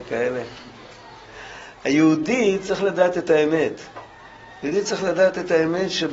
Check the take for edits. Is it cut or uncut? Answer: uncut